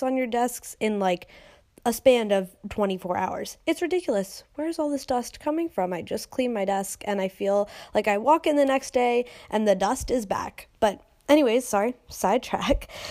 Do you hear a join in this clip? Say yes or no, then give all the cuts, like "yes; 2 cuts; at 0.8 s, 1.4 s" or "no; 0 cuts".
no; 0 cuts